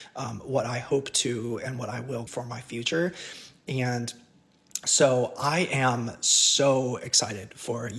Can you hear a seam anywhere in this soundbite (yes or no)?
yes